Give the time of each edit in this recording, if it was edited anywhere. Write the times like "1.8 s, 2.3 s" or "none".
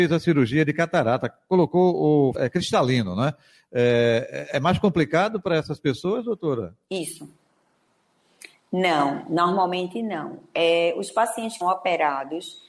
2.3 s, 11.6 s

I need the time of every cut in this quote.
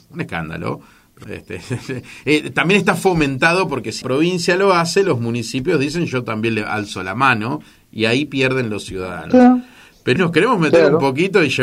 1.2 s, 4.0 s, 10.2 s

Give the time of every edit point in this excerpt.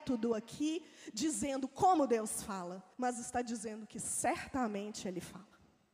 2.9 s

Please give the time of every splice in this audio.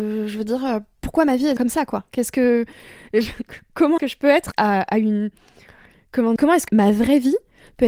1.6 s, 4.0 s, 4.5 s, 6.4 s, 6.7 s

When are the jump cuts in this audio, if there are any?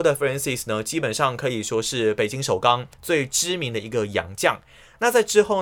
2.9 s

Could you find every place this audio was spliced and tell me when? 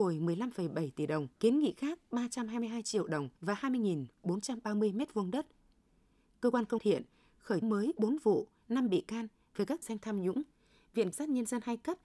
1.4 s, 3.4 s, 6.8 s, 7.6 s, 9.8 s, 11.1 s

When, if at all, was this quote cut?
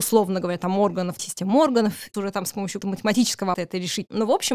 1.2 s, 2.1 s, 2.8 s, 3.5 s

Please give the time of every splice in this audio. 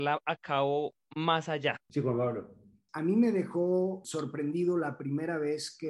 none

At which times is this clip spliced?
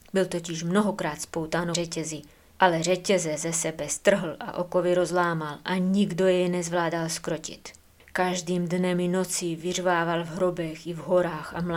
1.7 s

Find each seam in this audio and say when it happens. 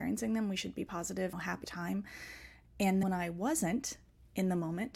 1.3 s, 1.6 s, 3.0 s

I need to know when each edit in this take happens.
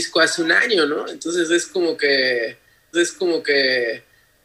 2.9 s

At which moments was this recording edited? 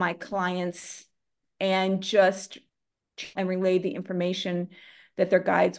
1.4 s, 3.4 s

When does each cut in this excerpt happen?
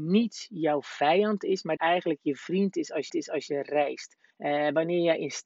1.8 s, 3.1 s, 4.3 s

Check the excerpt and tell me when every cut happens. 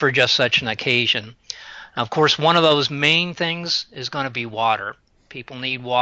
none

